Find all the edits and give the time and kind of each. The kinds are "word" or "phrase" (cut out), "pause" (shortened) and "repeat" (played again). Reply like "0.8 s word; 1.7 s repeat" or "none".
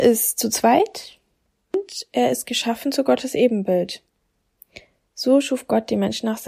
none